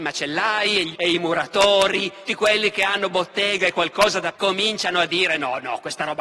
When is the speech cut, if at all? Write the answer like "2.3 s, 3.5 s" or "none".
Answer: 0.9 s, 2.3 s, 4.3 s